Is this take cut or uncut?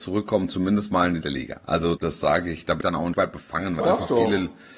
cut